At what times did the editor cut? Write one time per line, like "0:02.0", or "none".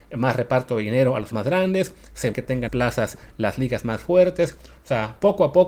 0:01.3
0:02.3
0:02.7